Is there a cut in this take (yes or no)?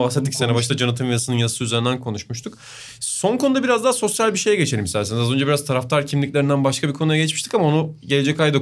no